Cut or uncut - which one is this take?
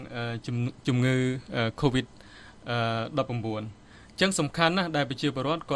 uncut